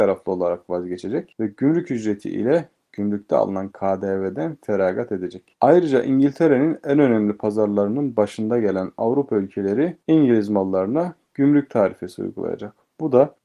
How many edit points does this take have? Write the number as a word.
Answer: zero